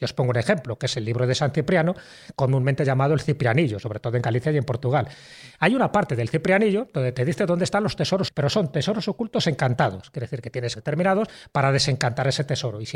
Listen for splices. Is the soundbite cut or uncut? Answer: cut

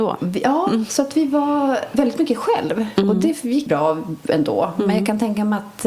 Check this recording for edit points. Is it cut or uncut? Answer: cut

